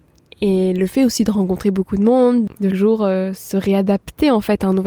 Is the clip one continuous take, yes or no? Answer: no